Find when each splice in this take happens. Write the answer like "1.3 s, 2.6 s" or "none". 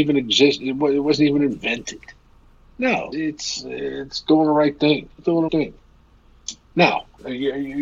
3.1 s, 5.1 s, 5.5 s